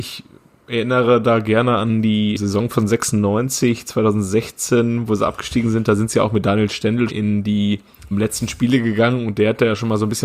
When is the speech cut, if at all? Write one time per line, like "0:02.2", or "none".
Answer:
0:02.4
0:07.1
0:08.1